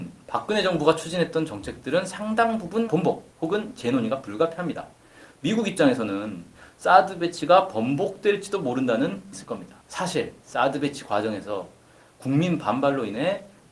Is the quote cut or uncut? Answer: cut